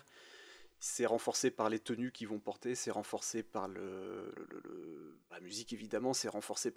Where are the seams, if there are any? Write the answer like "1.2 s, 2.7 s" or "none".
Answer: 4.3 s, 5.3 s